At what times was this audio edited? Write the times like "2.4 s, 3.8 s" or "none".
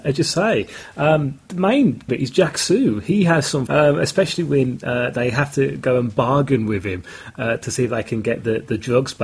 1.5 s, 2.1 s, 3.7 s